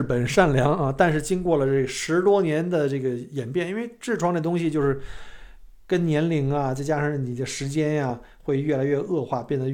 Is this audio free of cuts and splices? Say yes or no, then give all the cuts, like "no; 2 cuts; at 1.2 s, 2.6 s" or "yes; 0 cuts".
yes; 0 cuts